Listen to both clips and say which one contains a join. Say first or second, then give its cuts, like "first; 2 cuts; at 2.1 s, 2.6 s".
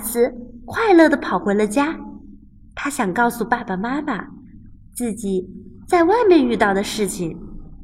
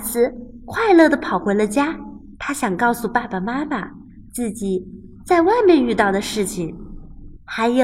second; 2 cuts; at 2.3 s, 4.3 s